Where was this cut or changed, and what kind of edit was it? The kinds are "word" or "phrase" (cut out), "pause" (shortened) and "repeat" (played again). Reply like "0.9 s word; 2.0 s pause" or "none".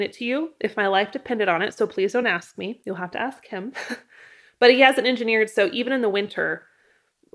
none